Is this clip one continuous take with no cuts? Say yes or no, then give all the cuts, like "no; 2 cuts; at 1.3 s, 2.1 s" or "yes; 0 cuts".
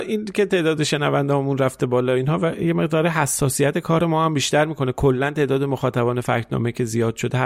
yes; 0 cuts